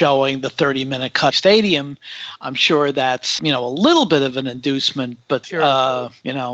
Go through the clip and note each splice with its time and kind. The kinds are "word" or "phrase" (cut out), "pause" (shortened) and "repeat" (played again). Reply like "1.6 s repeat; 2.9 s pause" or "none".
1.3 s phrase; 3.4 s word; 5.4 s word